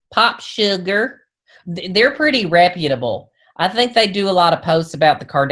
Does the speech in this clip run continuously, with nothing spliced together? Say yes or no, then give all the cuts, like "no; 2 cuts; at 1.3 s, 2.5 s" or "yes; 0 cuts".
yes; 0 cuts